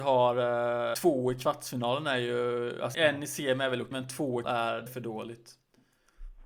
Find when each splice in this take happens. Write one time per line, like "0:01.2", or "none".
0:00.9
0:02.9
0:03.9
0:04.4
0:04.9